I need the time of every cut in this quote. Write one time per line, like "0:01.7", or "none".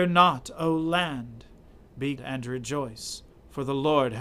0:02.2

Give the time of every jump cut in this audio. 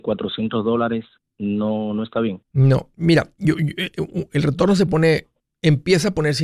none

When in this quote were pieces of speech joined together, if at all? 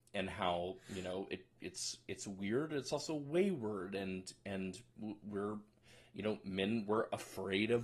none

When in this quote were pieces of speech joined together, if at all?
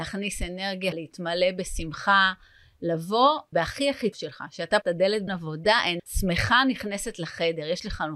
0:00.9
0:03.5
0:04.1
0:04.8
0:05.3
0:06.0

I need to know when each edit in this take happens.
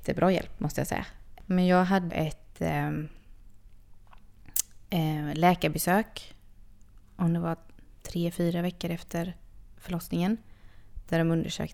0:02.1

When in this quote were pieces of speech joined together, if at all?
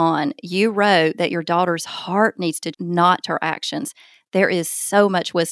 0:02.7
0:03.2

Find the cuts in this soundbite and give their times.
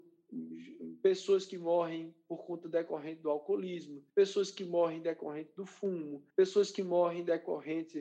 0:04.1
0:06.3

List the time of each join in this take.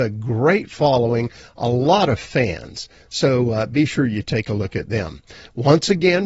none

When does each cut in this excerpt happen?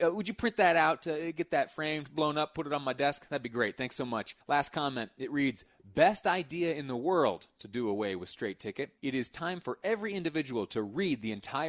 0:04.4
0:09.0

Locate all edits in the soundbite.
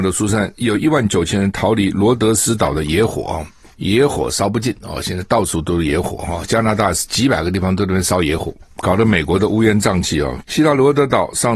0:10.4

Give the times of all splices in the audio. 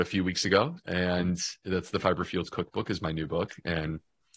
none

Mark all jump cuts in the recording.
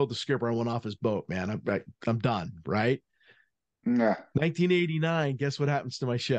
none

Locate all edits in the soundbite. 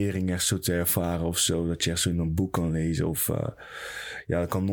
none

